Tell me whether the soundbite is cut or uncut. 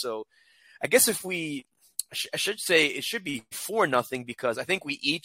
uncut